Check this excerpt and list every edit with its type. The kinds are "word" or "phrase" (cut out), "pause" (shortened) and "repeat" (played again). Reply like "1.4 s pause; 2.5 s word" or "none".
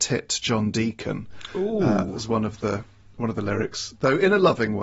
none